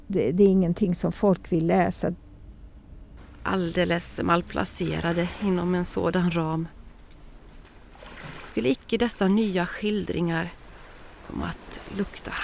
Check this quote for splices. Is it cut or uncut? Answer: uncut